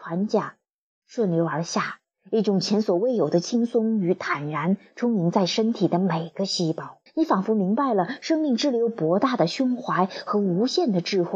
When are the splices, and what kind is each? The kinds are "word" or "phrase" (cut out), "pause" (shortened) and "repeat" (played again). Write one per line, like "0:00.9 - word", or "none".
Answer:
0:07.1 - pause